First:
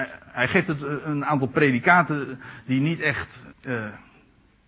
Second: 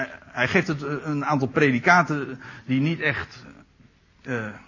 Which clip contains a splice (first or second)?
first